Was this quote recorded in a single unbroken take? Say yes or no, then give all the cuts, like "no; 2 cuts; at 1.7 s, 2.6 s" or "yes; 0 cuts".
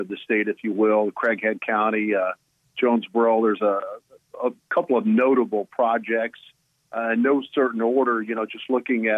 yes; 0 cuts